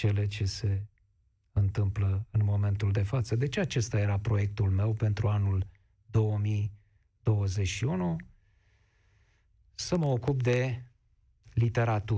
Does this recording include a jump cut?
no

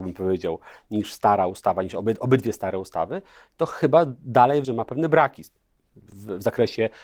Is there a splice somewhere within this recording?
yes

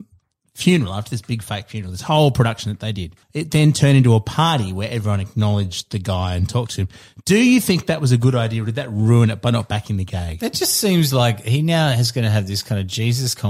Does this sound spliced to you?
yes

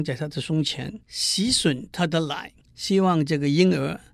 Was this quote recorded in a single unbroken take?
no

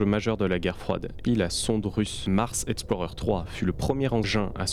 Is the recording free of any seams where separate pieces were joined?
no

